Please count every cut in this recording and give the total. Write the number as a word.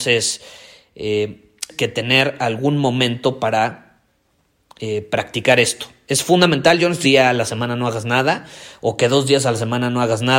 two